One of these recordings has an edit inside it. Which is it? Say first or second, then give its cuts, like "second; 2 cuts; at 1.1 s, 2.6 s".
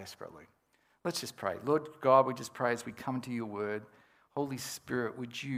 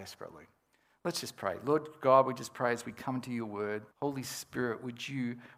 second; 1 cut; at 3.9 s